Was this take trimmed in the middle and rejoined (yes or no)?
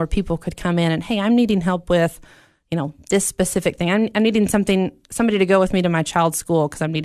no